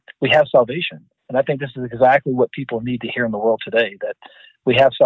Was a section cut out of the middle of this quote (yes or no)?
yes